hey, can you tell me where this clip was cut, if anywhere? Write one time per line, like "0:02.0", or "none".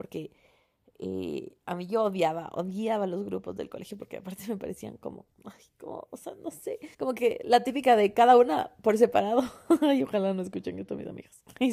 0:05.3
0:06.9